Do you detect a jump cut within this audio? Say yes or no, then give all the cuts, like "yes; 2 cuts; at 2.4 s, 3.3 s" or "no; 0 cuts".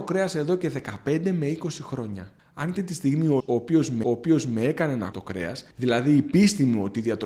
yes; 6 cuts; at 2.4 s, 2.8 s, 3.4 s, 4.0 s, 5.1 s, 5.7 s